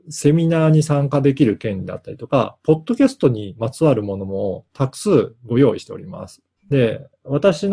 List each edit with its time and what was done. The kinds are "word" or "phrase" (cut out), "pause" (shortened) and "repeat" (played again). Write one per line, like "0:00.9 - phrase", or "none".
0:06.6 - pause